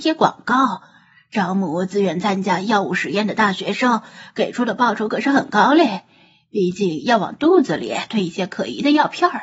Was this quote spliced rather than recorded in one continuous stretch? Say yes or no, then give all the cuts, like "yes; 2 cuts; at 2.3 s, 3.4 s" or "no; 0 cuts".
no; 0 cuts